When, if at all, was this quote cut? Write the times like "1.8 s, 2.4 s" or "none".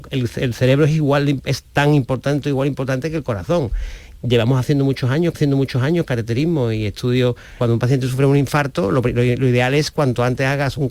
1.7 s, 5.3 s, 7.6 s